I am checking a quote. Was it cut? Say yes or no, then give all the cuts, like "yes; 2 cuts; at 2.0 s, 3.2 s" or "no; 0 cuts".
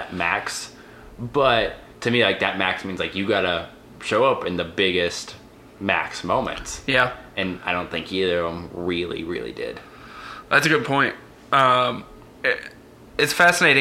no; 0 cuts